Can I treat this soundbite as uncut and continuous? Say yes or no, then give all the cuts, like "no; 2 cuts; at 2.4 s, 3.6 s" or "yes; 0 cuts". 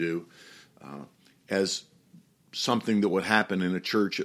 yes; 0 cuts